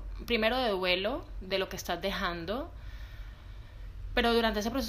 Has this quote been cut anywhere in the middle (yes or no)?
no